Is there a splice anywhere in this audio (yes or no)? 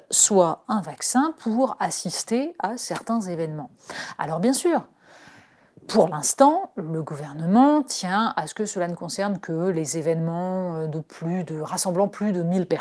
no